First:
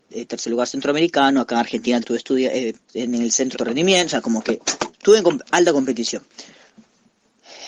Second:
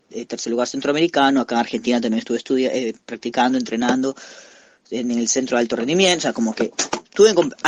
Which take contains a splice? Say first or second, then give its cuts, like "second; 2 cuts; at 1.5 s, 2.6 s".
first; 3 cuts; at 2.0 s, 2.8 s, 3.5 s